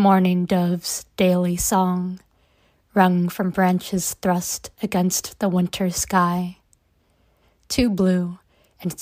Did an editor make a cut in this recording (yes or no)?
no